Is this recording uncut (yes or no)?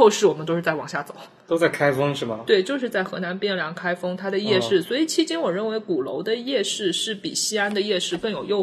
yes